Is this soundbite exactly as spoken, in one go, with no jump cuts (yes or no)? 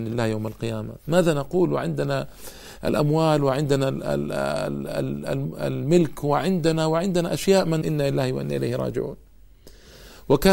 no